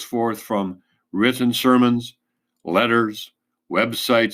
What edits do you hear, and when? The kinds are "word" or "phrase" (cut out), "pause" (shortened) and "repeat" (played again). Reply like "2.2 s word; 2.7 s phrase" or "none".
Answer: none